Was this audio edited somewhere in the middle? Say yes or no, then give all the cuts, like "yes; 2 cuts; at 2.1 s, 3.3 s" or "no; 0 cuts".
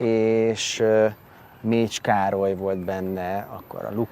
no; 0 cuts